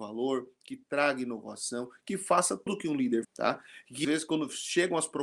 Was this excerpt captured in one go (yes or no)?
no